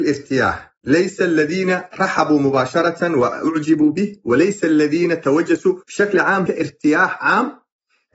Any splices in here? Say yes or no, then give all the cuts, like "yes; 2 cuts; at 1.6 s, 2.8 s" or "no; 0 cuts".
yes; 3 cuts; at 1.9 s, 5.8 s, 6.5 s